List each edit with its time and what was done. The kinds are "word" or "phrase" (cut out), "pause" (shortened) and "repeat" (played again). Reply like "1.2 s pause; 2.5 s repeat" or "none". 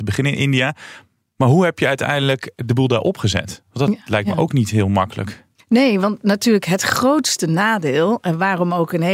none